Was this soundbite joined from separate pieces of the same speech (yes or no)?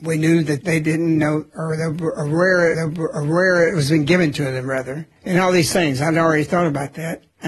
yes